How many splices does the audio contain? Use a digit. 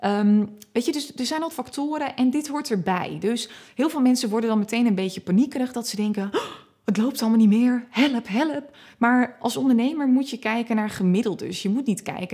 1